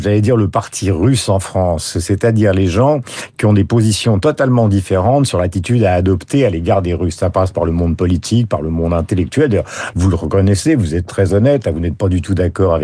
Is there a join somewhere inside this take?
no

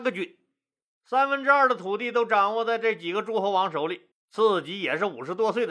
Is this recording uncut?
no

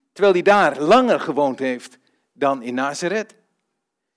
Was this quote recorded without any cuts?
yes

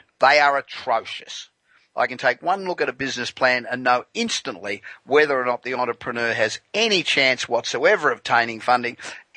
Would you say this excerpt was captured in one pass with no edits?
yes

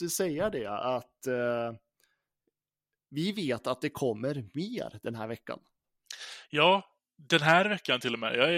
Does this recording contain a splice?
no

